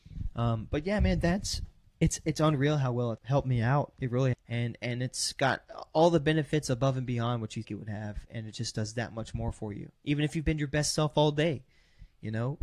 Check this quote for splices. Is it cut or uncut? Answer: cut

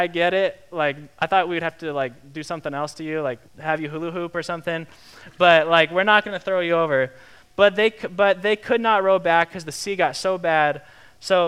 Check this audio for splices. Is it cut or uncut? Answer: cut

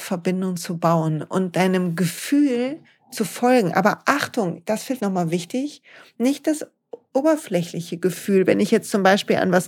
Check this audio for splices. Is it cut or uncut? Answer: cut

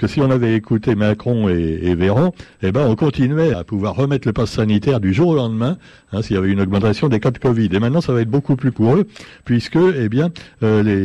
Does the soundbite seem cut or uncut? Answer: cut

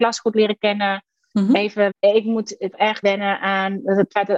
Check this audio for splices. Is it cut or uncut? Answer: cut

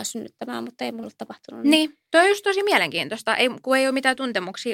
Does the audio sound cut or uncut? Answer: cut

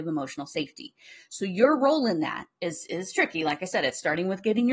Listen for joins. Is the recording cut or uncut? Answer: uncut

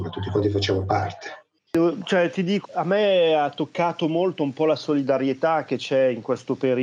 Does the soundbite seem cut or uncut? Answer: cut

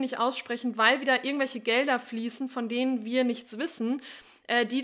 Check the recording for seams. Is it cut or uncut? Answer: uncut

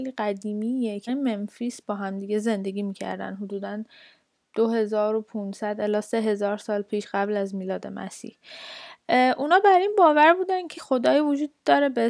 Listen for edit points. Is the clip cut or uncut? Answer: cut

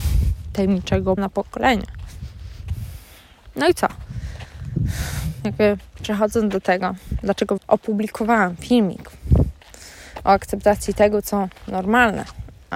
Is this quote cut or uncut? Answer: cut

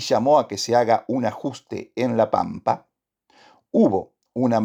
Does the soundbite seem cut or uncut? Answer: uncut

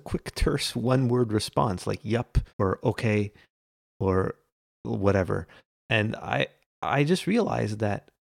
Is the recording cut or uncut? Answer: cut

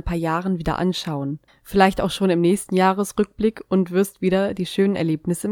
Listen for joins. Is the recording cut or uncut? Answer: cut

